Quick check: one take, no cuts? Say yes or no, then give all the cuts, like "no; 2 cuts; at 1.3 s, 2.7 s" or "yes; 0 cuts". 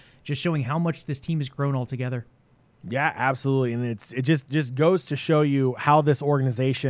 yes; 0 cuts